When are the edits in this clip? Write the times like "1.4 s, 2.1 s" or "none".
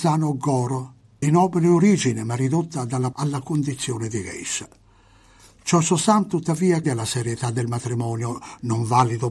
1.2 s, 3.1 s, 6.8 s